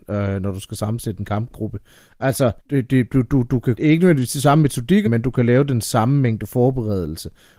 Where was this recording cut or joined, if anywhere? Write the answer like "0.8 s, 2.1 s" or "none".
2.6 s, 3.8 s, 5.1 s